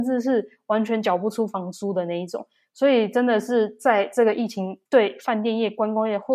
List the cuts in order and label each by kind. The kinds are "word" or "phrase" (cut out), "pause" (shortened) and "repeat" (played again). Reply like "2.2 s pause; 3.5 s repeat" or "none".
4.9 s pause